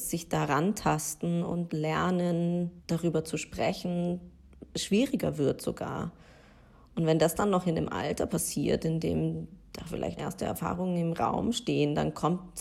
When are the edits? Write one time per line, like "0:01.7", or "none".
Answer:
0:02.8
0:10.2